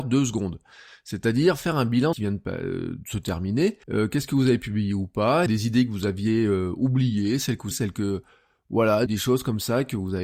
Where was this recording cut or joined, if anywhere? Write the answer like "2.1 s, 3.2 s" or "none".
2.1 s, 3.8 s, 5.5 s, 7.7 s, 9.1 s